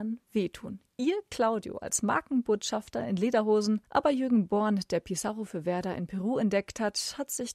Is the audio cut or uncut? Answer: cut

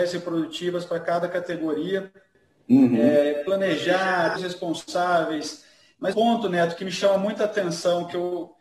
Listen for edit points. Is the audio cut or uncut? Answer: cut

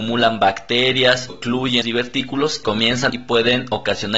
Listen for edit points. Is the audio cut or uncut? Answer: cut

